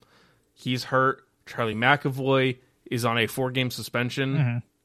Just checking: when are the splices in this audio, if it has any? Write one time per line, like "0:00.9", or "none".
none